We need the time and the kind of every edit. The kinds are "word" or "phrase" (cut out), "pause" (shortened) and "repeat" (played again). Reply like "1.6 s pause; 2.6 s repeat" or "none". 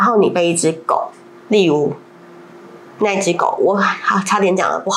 none